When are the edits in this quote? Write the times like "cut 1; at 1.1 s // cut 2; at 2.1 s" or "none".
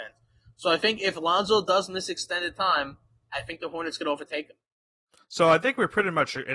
none